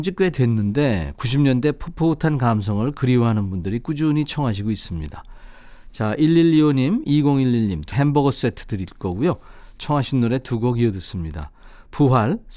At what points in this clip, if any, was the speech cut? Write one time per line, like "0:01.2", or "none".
0:07.9

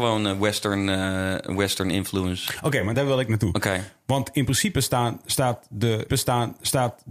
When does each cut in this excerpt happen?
0:02.9
0:06.1

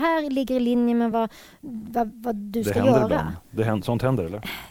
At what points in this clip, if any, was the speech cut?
none

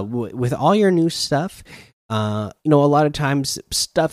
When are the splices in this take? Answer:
0:02.6

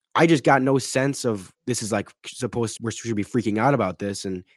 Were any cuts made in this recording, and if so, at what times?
0:01.5
0:02.8

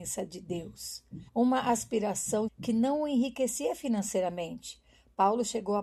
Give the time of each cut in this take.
0:01.3
0:02.5

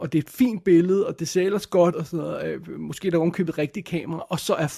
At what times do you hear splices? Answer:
0:01.9

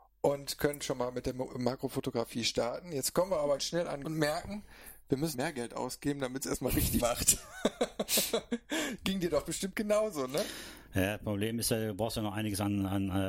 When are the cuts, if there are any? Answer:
0:03.6
0:04.0
0:05.3
0:07.0

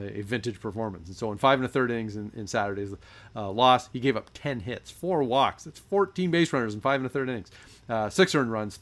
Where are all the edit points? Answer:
none

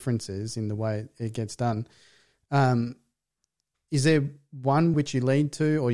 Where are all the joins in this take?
0:04.9

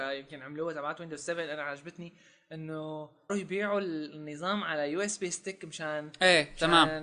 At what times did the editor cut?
0:03.3

